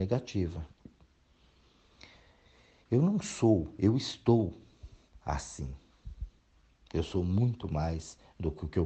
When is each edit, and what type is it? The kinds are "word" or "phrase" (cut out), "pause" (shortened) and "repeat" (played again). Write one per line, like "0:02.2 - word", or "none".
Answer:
none